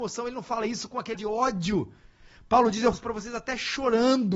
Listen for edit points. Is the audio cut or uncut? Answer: cut